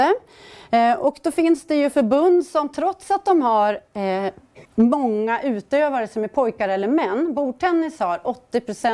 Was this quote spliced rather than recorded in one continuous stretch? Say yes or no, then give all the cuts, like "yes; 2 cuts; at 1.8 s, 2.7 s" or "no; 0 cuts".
yes; 1 cut; at 4.6 s